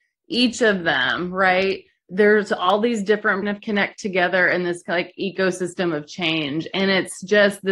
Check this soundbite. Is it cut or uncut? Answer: cut